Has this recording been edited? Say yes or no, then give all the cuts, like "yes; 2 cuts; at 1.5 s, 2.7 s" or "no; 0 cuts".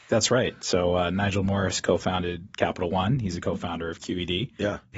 no; 0 cuts